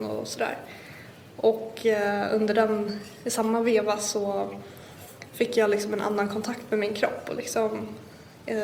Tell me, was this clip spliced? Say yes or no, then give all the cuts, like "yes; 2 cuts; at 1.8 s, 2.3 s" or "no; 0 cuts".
no; 0 cuts